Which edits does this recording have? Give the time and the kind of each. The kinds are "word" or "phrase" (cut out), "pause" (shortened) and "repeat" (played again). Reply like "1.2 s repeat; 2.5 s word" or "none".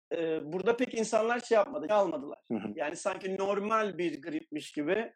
1.9 s word